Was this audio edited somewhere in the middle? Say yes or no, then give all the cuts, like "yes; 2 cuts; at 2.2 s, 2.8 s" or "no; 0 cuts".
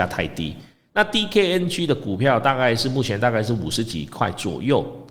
no; 0 cuts